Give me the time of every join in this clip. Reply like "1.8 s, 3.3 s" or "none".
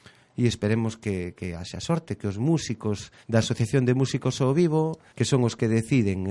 3.2 s, 5.1 s